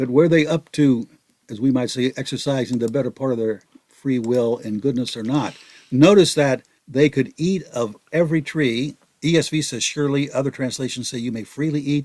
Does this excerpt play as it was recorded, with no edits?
no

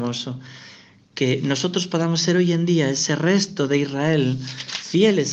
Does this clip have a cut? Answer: no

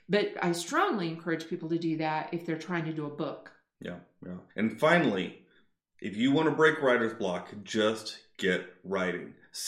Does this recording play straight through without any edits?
no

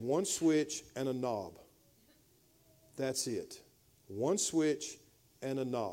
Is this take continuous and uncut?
yes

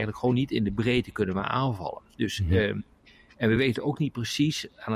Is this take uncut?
yes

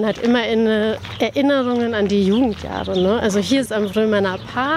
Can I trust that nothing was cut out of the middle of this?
no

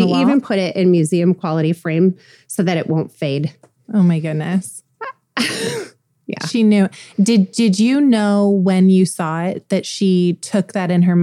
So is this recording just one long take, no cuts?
yes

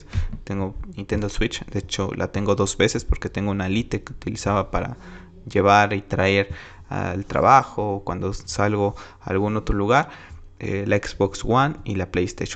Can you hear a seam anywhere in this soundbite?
no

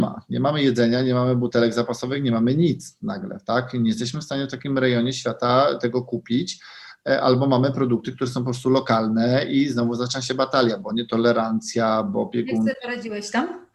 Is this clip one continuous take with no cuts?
yes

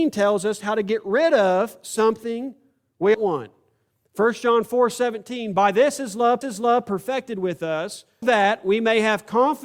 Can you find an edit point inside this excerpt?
yes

